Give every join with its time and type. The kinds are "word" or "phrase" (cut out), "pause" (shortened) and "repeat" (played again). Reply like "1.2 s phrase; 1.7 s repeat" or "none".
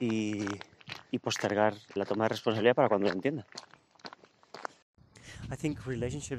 1.1 s word; 2.0 s word